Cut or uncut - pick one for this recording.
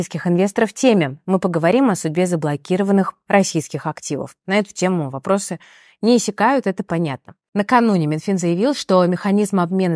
uncut